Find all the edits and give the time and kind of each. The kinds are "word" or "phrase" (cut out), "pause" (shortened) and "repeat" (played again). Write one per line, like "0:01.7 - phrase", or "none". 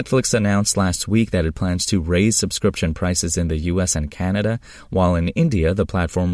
none